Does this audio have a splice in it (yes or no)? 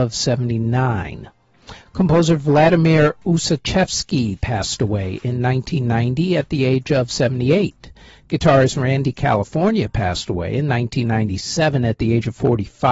no